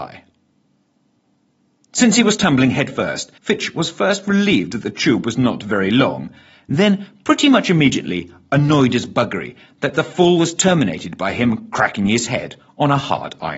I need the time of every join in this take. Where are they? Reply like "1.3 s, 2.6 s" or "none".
3.4 s